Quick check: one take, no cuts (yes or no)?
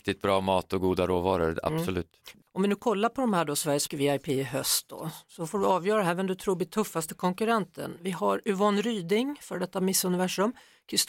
no